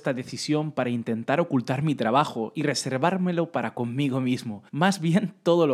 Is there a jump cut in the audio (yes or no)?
yes